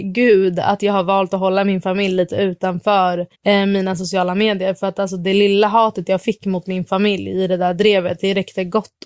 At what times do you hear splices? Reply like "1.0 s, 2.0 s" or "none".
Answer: 3.3 s